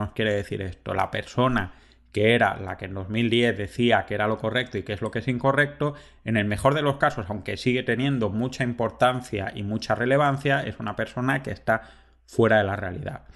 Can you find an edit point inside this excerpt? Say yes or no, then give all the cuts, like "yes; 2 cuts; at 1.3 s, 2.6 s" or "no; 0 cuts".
no; 0 cuts